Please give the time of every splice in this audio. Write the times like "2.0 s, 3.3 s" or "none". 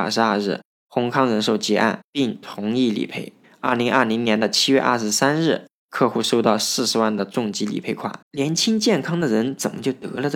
3.4 s, 8.2 s